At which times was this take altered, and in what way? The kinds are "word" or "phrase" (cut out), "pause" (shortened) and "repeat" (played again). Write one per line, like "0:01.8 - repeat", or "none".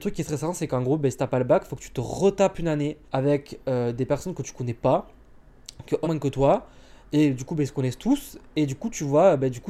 0:03.0 - pause
0:06.0 - word
0:07.0 - pause